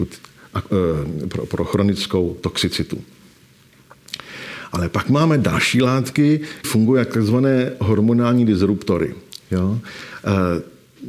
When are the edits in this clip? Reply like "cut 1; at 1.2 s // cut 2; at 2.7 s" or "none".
cut 1; at 6.6 s